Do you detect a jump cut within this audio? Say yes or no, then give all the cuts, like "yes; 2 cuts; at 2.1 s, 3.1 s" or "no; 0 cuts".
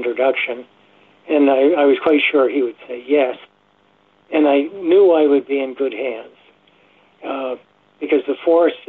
no; 0 cuts